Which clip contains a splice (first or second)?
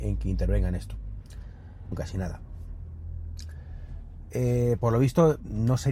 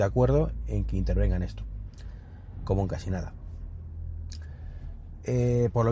first